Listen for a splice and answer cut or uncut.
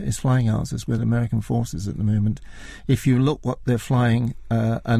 uncut